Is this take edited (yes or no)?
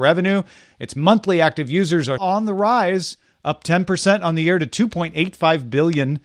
yes